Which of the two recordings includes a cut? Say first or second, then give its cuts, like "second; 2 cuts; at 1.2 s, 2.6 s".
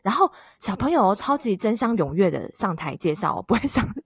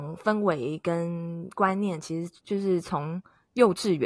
second; 1 cut; at 2.4 s